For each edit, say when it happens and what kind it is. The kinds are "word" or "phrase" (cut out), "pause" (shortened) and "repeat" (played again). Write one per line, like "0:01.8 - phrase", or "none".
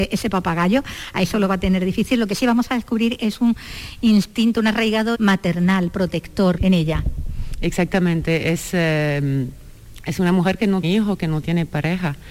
0:05.1 - word
0:06.6 - word
0:10.8 - word